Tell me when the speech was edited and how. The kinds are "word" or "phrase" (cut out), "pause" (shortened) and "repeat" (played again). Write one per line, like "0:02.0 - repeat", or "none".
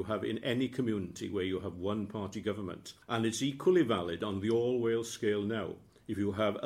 0:03.0 - pause